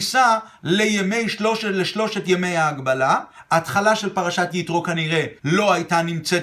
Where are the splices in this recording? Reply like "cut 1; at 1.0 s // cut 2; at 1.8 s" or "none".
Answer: cut 1; at 5.4 s